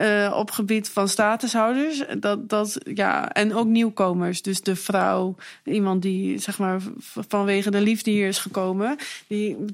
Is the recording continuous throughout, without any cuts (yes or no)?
yes